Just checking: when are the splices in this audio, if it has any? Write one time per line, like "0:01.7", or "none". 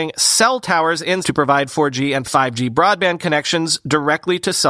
0:01.2
0:02.2